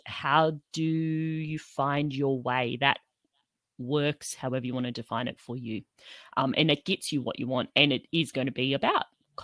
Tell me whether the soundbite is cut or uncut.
uncut